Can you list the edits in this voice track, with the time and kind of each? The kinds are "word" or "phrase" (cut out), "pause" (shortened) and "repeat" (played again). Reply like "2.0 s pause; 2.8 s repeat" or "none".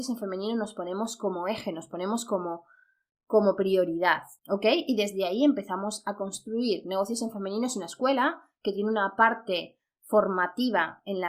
4.4 s pause